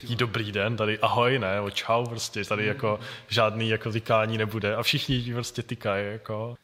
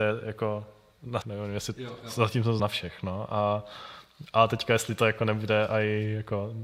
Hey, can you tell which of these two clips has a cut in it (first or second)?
second